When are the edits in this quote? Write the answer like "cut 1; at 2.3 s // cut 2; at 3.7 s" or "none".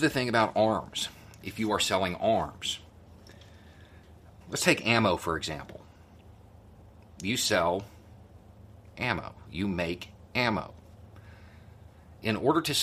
cut 1; at 4.4 s